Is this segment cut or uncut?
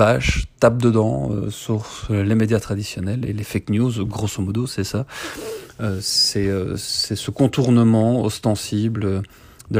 uncut